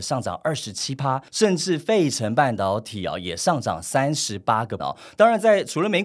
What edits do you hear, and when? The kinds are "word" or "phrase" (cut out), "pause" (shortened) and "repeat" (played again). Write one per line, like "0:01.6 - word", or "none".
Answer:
0:04.8 - word